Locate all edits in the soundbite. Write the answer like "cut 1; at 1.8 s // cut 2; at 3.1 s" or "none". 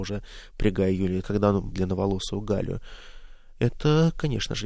cut 1; at 1.2 s // cut 2; at 1.7 s